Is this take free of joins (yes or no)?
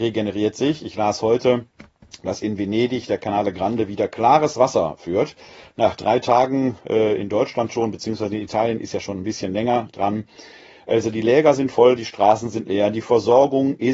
yes